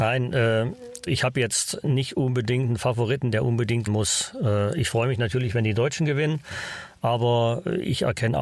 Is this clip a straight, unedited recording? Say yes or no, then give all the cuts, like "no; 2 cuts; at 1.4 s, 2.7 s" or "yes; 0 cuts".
no; 2 cuts; at 1.1 s, 3.9 s